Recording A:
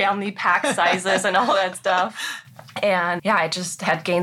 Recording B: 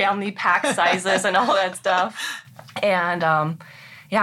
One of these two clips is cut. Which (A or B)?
A